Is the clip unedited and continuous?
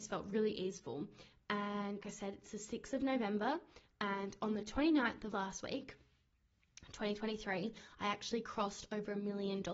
no; 2 cuts; at 2.0 s, 5.3 s

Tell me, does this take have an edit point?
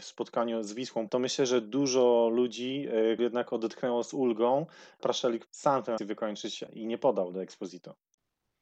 yes; 6 cuts; at 1.1 s, 3.2 s, 5.0 s, 5.5 s, 6.0 s, 6.7 s

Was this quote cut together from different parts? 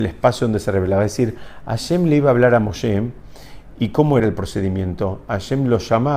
yes; 1 cut; at 4.2 s

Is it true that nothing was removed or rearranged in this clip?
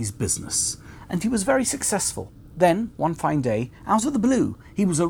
yes; 0 cuts

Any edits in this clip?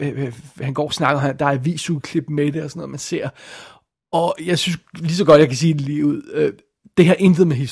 no; 0 cuts

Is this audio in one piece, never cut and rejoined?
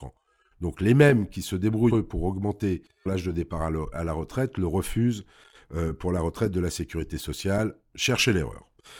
no; 2 cuts; at 1.9 s, 3.1 s

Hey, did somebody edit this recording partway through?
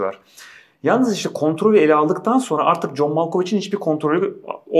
no; 0 cuts

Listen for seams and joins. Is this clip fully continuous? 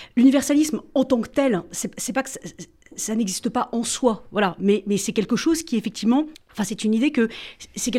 no; 1 cut; at 6.3 s

